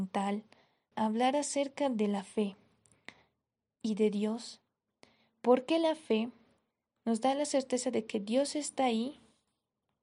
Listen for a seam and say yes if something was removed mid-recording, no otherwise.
yes